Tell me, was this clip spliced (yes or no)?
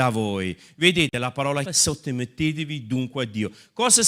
yes